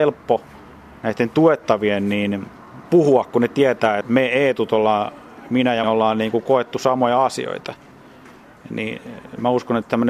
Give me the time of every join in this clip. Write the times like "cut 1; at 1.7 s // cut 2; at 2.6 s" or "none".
cut 1; at 4.0 s // cut 2; at 5.8 s